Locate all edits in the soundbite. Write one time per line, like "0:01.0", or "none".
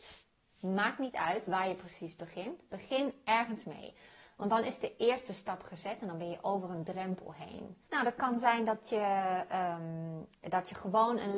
0:07.9

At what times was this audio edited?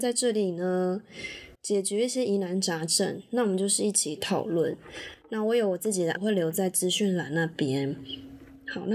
0:01.5
0:06.2

